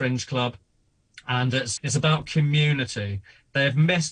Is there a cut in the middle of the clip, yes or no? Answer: yes